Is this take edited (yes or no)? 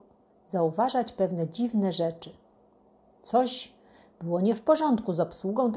no